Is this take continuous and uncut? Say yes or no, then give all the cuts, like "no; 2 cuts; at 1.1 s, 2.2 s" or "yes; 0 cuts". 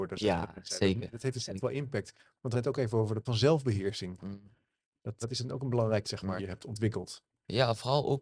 no; 5 cuts; at 2.5 s, 3.3 s, 5.2 s, 6.0 s, 6.4 s